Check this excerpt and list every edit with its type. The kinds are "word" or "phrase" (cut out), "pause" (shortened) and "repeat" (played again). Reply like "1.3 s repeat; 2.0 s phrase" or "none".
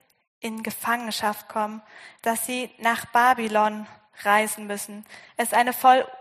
none